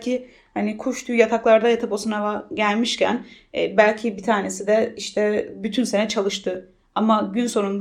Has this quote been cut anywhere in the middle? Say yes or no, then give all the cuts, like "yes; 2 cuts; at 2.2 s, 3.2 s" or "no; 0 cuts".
no; 0 cuts